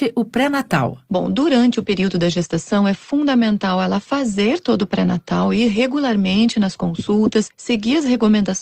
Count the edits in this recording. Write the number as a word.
zero